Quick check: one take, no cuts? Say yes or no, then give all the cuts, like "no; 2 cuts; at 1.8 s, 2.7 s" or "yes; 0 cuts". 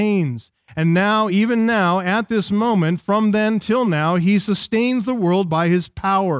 yes; 0 cuts